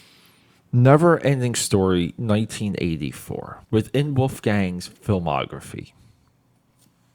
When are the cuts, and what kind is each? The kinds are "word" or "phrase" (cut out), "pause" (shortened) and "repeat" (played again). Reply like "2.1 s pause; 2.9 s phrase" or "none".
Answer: 3.6 s pause